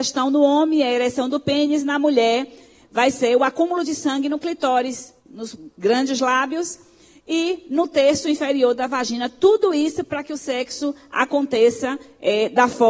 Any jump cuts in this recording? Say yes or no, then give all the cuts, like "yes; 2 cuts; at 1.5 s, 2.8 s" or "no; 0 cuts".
no; 0 cuts